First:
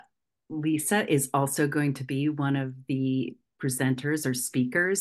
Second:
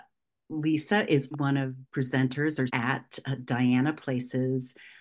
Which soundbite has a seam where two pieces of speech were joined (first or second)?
second